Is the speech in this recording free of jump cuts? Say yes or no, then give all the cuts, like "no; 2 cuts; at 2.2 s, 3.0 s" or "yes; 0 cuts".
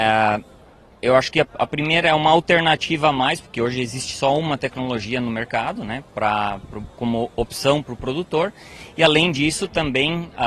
yes; 0 cuts